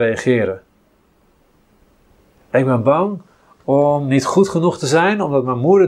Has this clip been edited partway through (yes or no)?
no